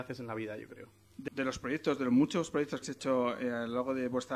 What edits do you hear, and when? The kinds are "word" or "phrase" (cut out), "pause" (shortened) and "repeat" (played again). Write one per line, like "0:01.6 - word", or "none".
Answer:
0:01.3 - word
0:02.8 - word